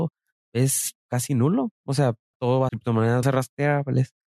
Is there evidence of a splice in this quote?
yes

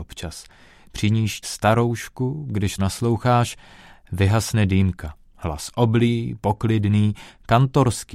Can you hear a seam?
yes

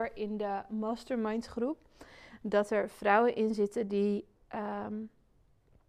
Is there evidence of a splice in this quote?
no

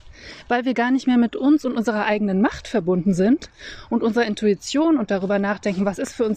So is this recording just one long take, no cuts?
yes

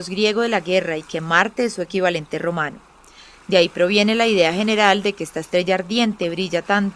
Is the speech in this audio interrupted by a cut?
no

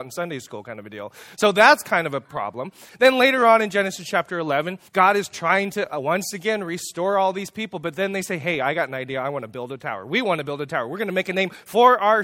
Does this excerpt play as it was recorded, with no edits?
no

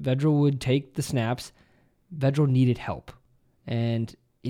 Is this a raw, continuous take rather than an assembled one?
yes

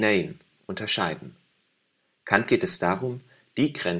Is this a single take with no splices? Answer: yes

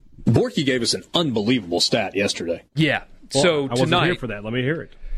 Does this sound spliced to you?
yes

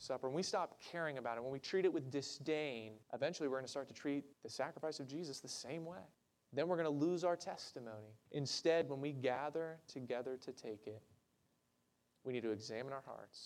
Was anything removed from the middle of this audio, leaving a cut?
yes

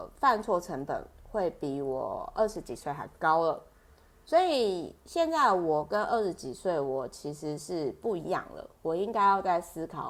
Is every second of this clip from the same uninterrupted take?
yes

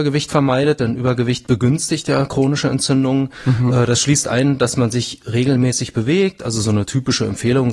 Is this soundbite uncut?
yes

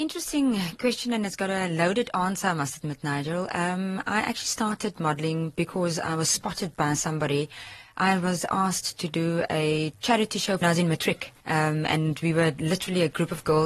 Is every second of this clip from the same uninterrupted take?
no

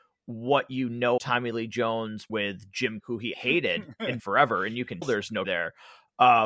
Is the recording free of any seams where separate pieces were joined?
no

